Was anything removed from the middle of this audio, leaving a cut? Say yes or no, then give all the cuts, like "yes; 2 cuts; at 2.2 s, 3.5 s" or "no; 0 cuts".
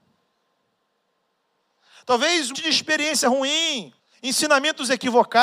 yes; 2 cuts; at 2.5 s, 4.0 s